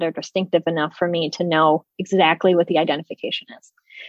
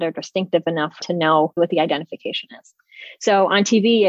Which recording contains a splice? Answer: second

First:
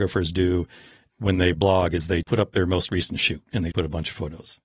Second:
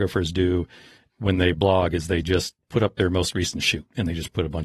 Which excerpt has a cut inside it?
first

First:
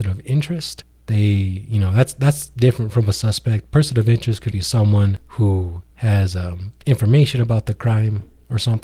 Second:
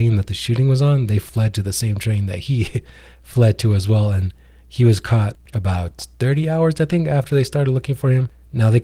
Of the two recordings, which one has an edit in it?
first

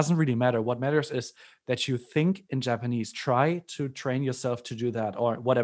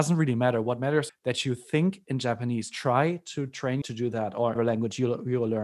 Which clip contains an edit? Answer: second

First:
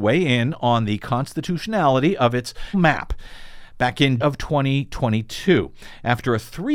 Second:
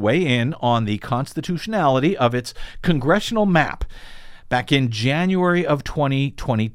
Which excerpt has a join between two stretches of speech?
first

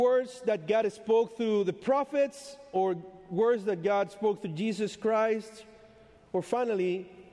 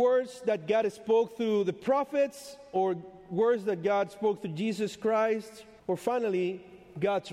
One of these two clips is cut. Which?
second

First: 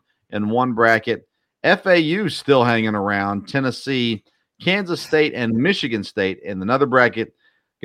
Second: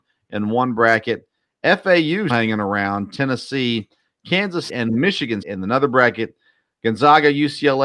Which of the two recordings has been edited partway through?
second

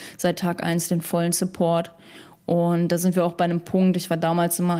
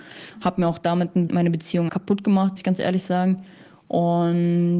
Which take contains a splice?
second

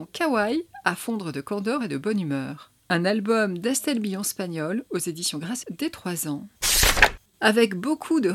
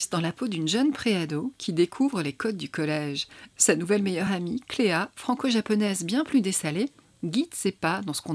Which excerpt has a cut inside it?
first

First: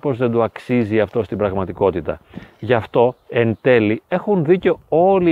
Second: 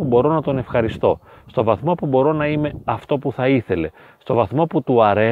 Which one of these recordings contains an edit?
first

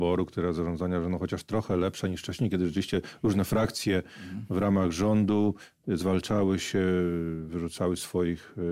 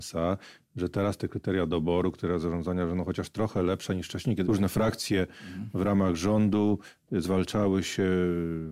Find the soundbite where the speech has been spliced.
second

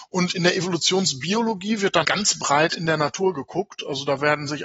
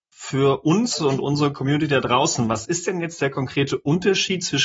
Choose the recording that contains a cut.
first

